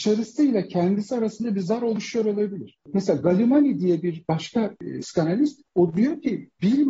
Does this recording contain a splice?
no; 0 cuts

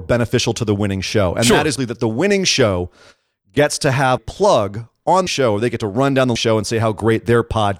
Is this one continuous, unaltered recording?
no; 4 cuts; at 1.8 s, 4.2 s, 5.3 s, 6.4 s

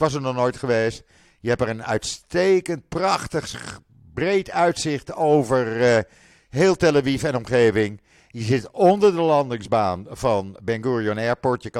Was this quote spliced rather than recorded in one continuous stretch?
no; 0 cuts

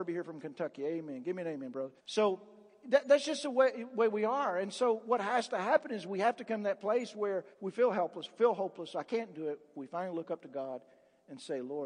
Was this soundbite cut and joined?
yes; 2 cuts; at 2.0 s, 7.5 s

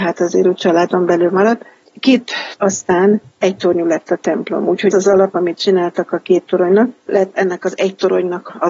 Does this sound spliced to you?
yes; 2 cuts; at 2.6 s, 4.9 s

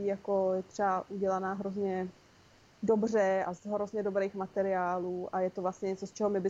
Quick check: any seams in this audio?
yes; 1 cut; at 3.6 s

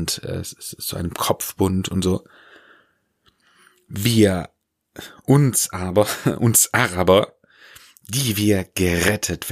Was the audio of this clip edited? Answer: no; 0 cuts

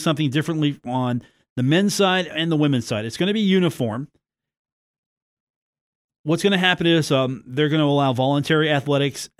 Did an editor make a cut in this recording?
no; 0 cuts

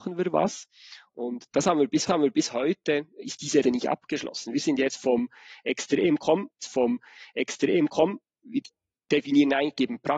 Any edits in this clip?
yes; 3 cuts; at 2.1 s, 3.6 s, 6.6 s

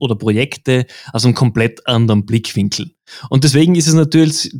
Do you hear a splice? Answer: no; 0 cuts

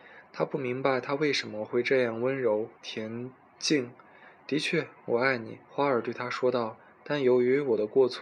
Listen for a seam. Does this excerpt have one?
yes; 2 cuts; at 2.8 s, 5.6 s

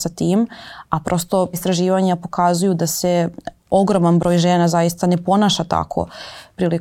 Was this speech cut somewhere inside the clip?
yes; 1 cut; at 1.5 s

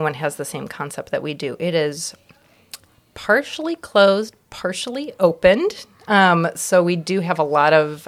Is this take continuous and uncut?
yes; 0 cuts

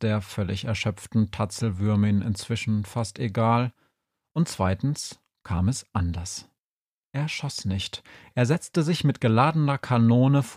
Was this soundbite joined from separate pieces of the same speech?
no; 0 cuts

